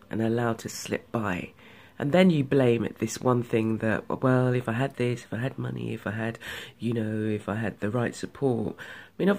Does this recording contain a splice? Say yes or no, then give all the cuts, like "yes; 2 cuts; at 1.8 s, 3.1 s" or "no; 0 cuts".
no; 0 cuts